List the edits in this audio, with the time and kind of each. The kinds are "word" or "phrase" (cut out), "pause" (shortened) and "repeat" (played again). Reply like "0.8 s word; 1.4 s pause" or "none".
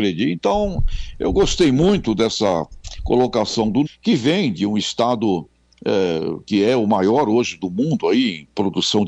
3.9 s phrase